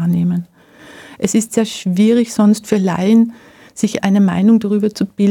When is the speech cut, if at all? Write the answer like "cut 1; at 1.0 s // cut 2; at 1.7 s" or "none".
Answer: cut 1; at 4.0 s